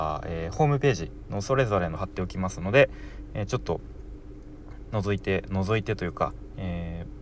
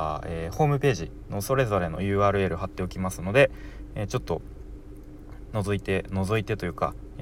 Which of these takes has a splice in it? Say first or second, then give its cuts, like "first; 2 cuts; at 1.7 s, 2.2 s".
first; 1 cut; at 2.0 s